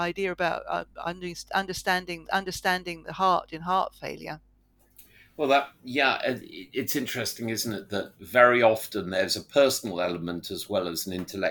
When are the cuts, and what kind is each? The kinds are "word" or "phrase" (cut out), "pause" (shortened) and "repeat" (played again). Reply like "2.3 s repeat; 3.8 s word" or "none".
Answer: 2.2 s repeat